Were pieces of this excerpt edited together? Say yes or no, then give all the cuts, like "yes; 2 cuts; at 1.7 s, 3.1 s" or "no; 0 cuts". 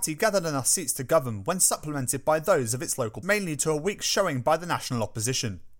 yes; 1 cut; at 3.2 s